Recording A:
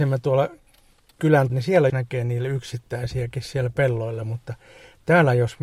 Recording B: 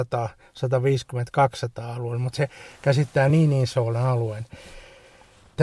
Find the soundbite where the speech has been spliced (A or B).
A